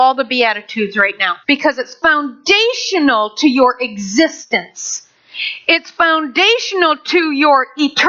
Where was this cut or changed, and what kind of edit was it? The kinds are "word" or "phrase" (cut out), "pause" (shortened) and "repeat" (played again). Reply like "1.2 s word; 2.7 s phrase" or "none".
1.4 s pause